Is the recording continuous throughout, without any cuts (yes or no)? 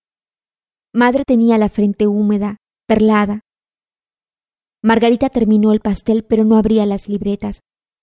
yes